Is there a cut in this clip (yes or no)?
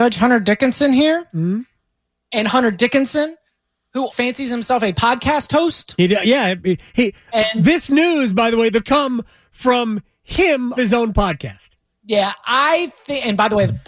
yes